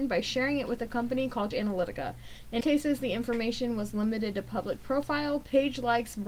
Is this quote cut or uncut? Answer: cut